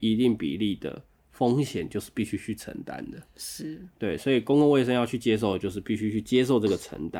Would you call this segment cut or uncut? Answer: uncut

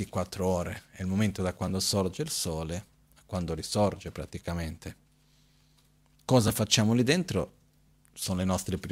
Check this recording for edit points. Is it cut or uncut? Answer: uncut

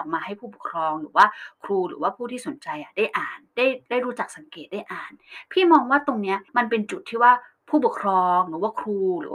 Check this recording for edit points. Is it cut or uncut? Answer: cut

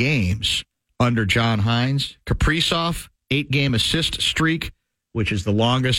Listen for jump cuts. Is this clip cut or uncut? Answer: uncut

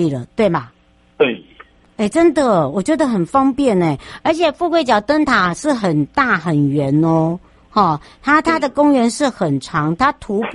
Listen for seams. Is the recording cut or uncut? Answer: uncut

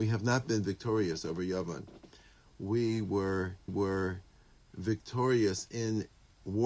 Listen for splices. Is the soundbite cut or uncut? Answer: cut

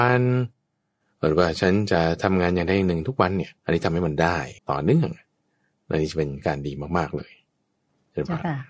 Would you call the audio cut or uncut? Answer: cut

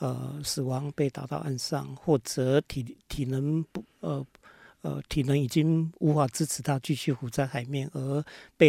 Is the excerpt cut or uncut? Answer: uncut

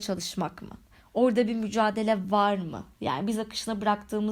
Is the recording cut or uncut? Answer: uncut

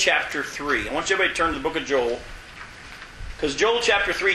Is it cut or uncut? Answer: uncut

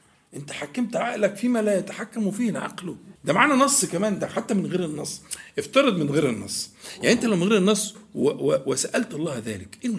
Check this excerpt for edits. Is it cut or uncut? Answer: cut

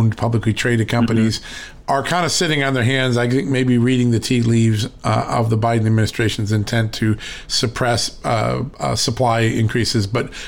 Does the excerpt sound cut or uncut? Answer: uncut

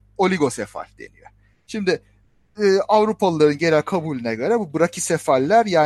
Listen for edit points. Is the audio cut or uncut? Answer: uncut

